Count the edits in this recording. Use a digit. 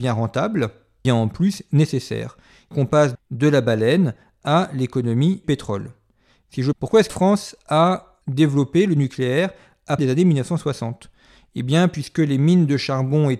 8